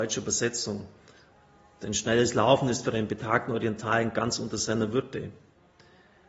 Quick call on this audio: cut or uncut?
uncut